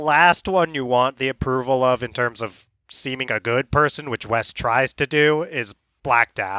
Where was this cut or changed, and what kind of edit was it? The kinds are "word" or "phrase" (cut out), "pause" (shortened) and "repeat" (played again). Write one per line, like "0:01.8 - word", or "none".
0:03.3 - word